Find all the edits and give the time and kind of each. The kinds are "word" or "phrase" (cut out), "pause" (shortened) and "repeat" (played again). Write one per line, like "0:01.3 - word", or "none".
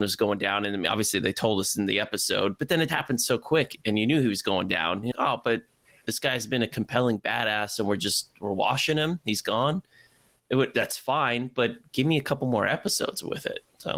0:02.9 - word
0:05.1 - word